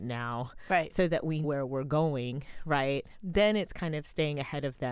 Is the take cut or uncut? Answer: cut